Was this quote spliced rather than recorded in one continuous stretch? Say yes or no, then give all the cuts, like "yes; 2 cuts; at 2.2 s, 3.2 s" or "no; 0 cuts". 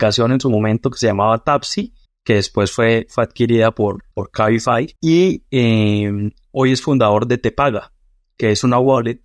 yes; 3 cuts; at 2.1 s, 4.1 s, 5.0 s